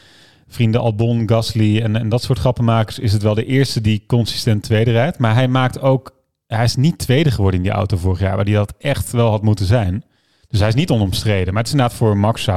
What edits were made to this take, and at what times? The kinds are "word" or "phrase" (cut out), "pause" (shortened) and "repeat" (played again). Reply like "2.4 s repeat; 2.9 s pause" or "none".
none